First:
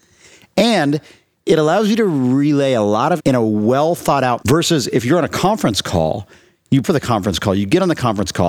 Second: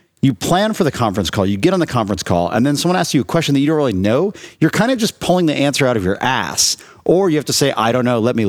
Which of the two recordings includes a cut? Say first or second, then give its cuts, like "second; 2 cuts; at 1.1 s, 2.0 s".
first; 3 cuts; at 3.2 s, 4.4 s, 6.8 s